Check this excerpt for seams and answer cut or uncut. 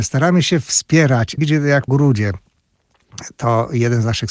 cut